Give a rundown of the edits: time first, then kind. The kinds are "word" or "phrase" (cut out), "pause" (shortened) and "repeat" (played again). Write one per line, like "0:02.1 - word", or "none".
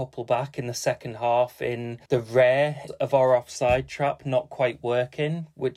0:02.1 - pause
0:02.9 - word